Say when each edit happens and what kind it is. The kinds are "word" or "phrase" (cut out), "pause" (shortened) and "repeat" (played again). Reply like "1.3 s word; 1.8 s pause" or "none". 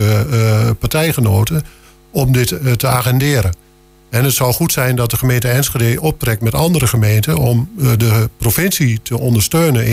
none

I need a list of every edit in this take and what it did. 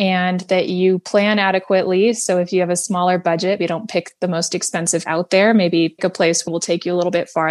3.6 s word; 5.0 s word; 6.0 s word; 6.5 s phrase

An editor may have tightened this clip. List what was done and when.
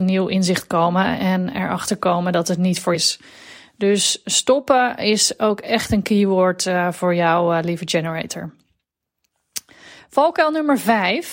2.9 s word

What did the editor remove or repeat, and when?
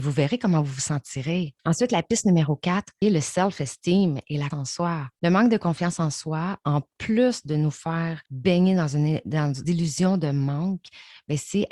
1.6 s pause; 3.0 s word; 4.5 s word; 5.2 s pause; 8.3 s pause; 9.6 s phrase

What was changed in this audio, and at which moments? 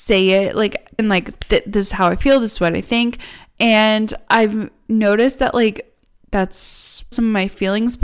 1.0 s word; 7.1 s word

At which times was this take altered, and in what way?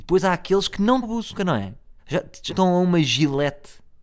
1.0 s word; 1.4 s word; 2.0 s pause; 2.5 s word

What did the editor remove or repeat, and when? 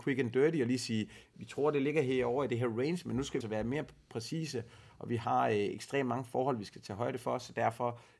3.4 s word

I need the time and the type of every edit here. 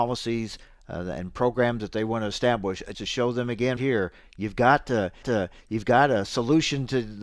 2.9 s word; 3.8 s word; 5.2 s repeat

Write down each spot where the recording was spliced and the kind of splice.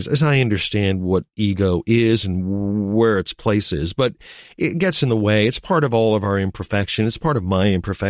none

